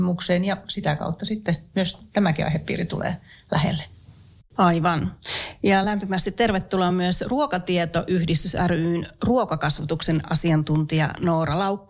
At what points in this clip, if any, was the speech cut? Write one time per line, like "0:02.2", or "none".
none